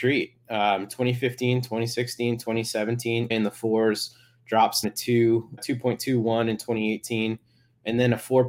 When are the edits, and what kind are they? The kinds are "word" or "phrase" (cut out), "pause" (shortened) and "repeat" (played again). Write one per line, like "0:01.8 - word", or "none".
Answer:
0:03.3 - word
0:04.8 - word
0:05.6 - word